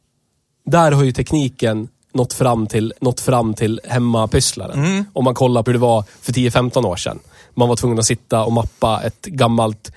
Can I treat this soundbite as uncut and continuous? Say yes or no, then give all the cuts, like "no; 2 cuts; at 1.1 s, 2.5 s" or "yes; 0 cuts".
no; 2 cuts; at 2.9 s, 5.7 s